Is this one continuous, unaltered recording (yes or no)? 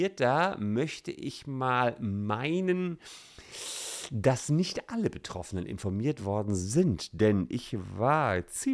yes